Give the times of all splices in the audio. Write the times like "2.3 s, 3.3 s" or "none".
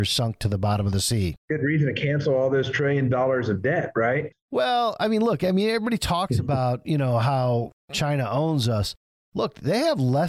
none